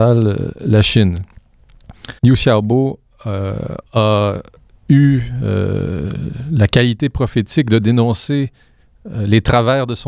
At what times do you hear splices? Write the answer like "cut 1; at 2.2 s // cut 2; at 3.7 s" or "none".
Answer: cut 1; at 2.2 s // cut 2; at 3.9 s